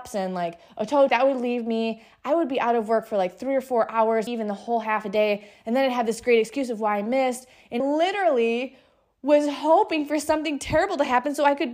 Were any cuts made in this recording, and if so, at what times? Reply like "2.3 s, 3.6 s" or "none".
1.1 s, 4.3 s, 7.8 s